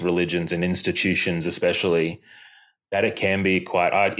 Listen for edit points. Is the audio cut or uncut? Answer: uncut